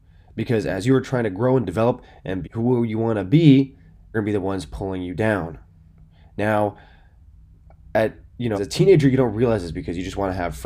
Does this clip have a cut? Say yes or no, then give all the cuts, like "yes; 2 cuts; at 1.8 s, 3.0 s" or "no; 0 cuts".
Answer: yes; 3 cuts; at 2.4 s, 4.1 s, 8.5 s